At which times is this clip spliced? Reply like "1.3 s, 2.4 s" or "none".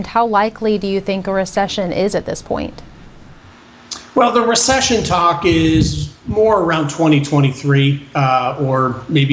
none